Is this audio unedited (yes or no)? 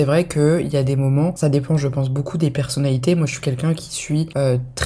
no